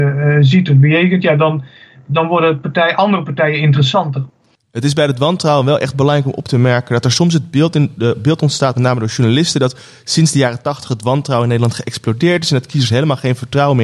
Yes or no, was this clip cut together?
no